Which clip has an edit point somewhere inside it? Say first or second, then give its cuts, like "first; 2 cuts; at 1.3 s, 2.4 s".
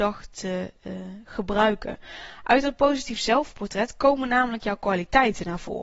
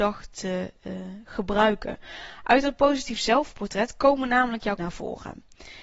second; 1 cut; at 4.8 s